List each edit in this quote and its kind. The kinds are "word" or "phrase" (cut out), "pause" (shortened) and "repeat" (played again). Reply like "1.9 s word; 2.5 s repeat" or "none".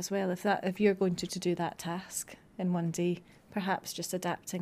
1.3 s word